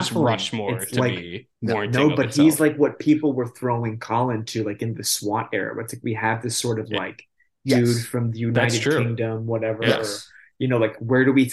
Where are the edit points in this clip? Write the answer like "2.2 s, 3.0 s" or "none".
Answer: none